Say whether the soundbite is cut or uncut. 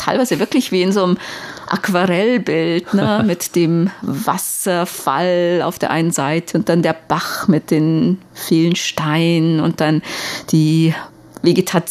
uncut